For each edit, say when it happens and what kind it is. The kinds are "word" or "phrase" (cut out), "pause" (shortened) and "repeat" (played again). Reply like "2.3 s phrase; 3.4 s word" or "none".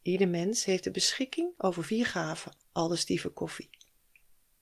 2.6 s pause